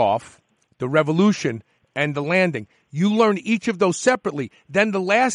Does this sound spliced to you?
no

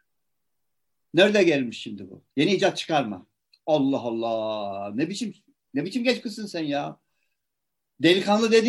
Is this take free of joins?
yes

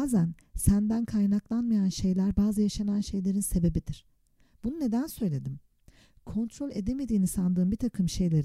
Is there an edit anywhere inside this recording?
no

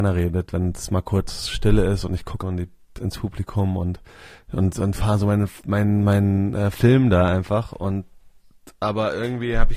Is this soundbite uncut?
no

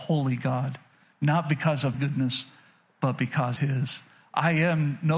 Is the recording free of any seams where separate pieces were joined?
no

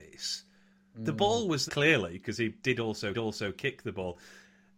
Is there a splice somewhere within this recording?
yes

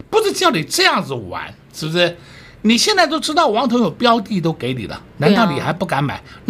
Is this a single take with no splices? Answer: yes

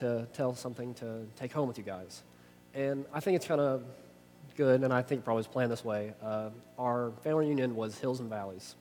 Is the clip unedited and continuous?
yes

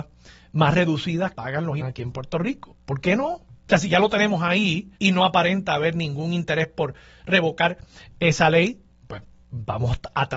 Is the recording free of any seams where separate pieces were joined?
no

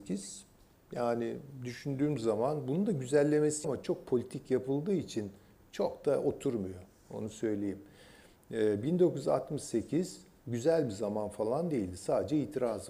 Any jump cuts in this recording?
yes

